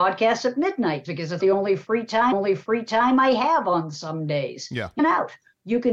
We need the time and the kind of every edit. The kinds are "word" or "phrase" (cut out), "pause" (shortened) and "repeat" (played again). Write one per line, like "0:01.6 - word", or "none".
0:01.0 - word
0:01.4 - word
0:02.3 - repeat
0:05.0 - phrase